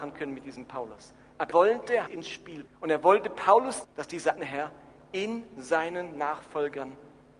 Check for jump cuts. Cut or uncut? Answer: cut